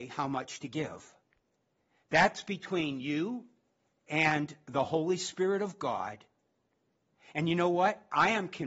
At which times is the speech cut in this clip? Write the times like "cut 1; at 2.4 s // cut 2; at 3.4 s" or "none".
none